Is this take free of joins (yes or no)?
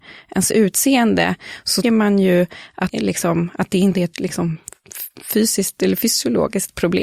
no